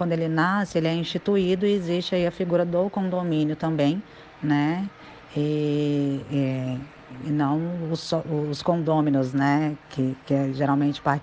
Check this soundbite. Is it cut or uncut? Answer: uncut